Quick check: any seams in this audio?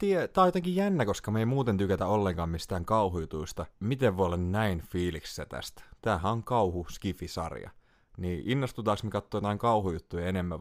no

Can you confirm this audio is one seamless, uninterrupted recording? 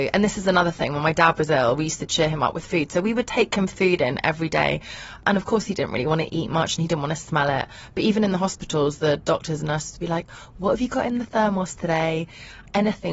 yes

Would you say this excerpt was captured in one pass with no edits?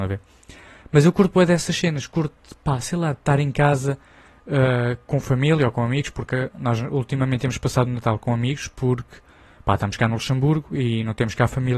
yes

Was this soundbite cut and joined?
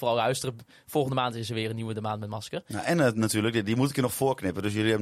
no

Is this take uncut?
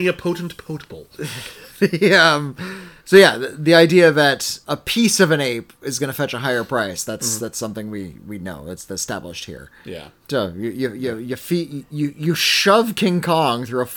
no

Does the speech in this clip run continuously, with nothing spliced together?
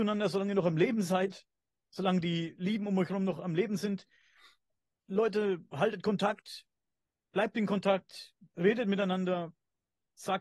yes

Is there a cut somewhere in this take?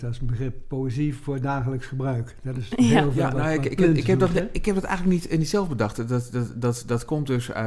no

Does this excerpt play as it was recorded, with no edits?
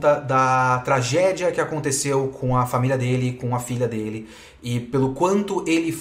yes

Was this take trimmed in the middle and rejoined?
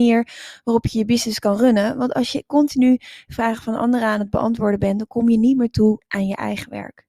no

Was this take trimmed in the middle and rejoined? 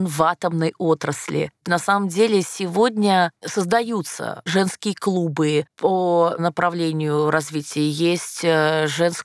yes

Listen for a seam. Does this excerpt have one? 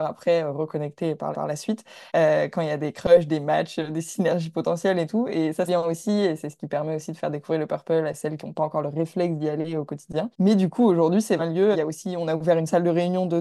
yes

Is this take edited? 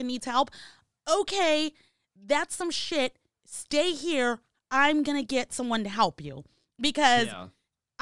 no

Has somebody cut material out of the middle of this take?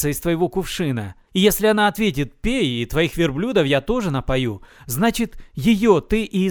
yes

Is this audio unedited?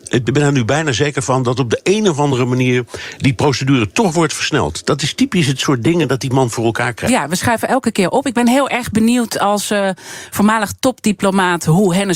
yes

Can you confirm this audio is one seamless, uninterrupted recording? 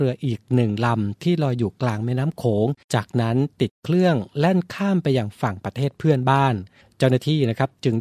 no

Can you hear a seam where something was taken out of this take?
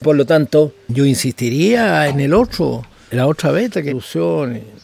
yes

